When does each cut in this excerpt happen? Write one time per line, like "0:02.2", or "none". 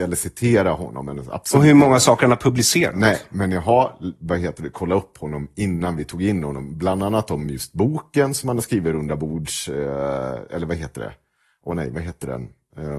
none